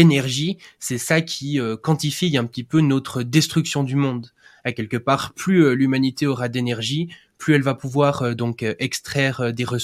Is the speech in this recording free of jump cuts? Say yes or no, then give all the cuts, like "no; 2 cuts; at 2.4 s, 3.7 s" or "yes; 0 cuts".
yes; 0 cuts